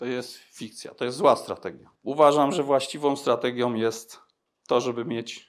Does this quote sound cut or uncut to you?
cut